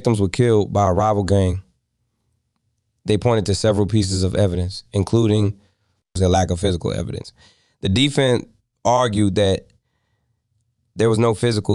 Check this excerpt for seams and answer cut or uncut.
uncut